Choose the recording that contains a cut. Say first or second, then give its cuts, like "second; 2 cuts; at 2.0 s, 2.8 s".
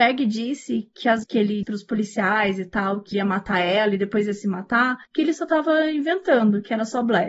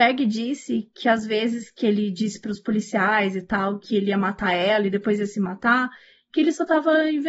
first; 4 cuts; at 1.2 s, 1.6 s, 3.1 s, 5.1 s